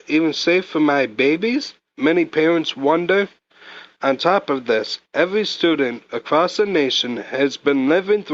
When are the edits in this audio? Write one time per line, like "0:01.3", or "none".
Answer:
none